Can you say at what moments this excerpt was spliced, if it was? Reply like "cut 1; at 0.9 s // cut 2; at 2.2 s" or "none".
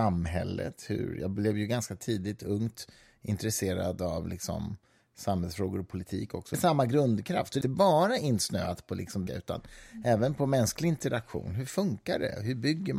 cut 1; at 6.5 s // cut 2; at 7.6 s // cut 3; at 9.3 s